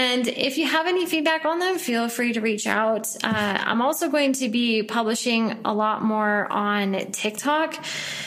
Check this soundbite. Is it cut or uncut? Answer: uncut